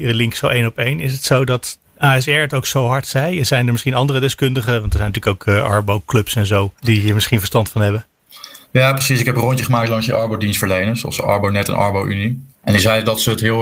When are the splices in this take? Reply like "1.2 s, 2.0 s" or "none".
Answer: 1.8 s, 6.8 s, 8.6 s, 12.5 s